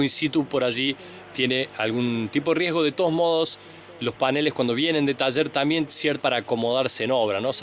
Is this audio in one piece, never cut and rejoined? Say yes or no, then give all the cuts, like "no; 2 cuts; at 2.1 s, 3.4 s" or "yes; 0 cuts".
no; 3 cuts; at 1.7 s, 5.9 s, 6.2 s